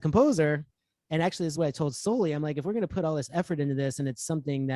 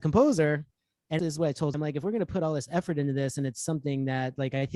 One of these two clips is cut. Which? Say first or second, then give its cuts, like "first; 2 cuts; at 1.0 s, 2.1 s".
second; 2 cuts; at 1.2 s, 1.7 s